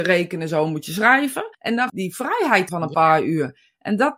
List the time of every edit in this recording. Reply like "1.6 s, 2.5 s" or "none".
1.5 s, 1.9 s, 2.7 s